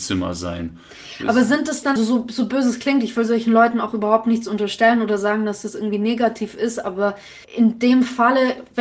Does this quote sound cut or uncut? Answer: cut